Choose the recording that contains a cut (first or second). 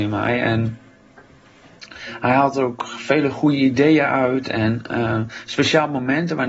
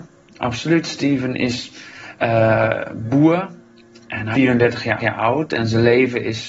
second